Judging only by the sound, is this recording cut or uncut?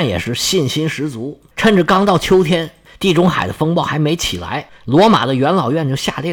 uncut